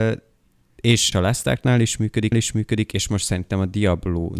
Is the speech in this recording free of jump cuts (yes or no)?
no